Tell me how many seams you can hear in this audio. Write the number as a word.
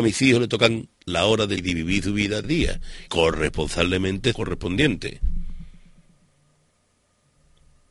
five